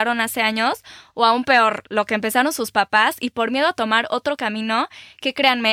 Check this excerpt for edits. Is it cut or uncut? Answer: uncut